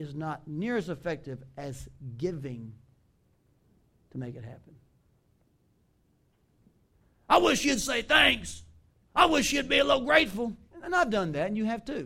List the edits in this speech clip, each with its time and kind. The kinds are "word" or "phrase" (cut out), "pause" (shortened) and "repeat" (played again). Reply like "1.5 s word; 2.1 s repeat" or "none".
none